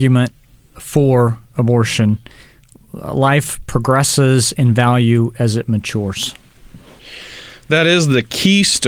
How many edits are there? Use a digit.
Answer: 0